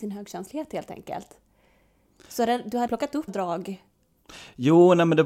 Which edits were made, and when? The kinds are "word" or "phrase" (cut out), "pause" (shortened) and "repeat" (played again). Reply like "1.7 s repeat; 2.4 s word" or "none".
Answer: 2.9 s word; 3.3 s word